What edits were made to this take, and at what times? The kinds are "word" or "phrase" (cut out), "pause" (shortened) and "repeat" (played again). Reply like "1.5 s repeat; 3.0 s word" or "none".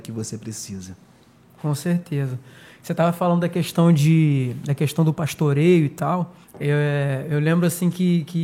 6.4 s pause